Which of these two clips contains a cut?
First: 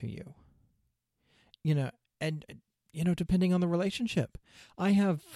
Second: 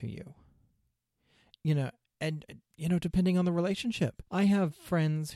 second; 2 cuts; at 2.7 s, 4.3 s

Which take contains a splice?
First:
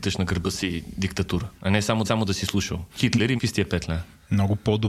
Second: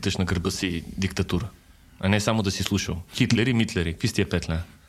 first; 3 cuts; at 1.6 s, 2.0 s, 3.4 s

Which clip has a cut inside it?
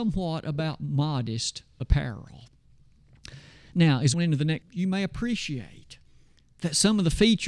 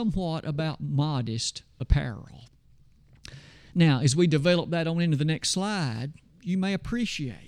first; 2 cuts; at 4.1 s, 4.6 s

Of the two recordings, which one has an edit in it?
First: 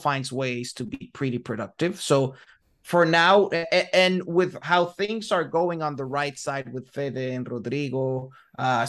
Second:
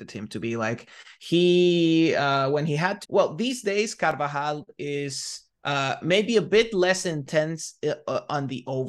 second; 2 cuts; at 3.0 s, 5.5 s

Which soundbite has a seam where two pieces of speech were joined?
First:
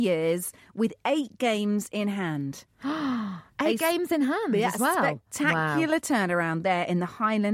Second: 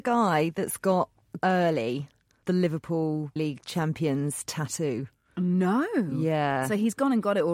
second; 3 cuts; at 1.4 s, 2.4 s, 3.4 s

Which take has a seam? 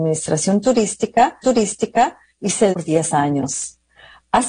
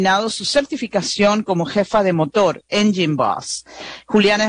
first; 2 cuts; at 1.4 s, 2.7 s

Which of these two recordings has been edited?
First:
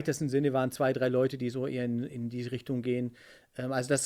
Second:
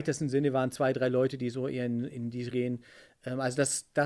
second; 1 cut; at 2.5 s

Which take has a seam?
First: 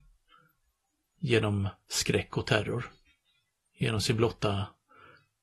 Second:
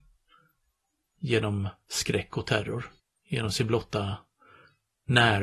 second; 1 cut; at 3.0 s

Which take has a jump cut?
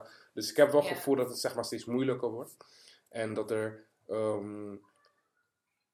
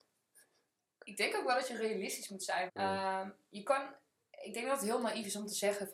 second; 1 cut; at 2.7 s

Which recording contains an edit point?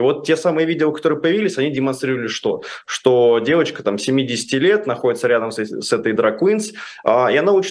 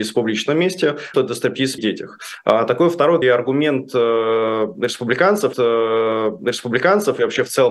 second; 4 cuts; at 1.1 s, 1.8 s, 3.2 s, 5.5 s

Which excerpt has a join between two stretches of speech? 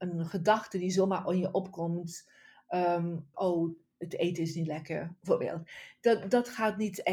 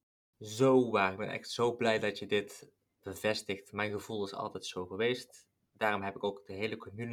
first; 1 cut; at 3.3 s

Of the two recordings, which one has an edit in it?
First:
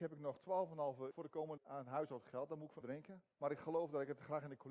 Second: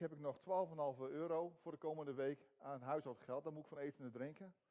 first; 4 cuts; at 1.1 s, 1.6 s, 2.8 s, 3.3 s

